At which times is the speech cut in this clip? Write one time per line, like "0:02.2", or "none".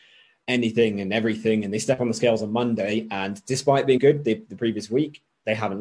0:04.0